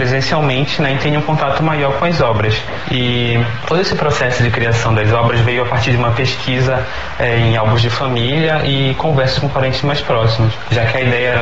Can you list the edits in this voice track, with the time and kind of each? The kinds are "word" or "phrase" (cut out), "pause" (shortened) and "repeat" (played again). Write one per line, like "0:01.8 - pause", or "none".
none